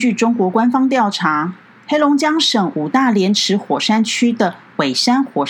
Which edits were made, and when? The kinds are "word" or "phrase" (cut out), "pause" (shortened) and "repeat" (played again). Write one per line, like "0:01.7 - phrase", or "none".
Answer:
none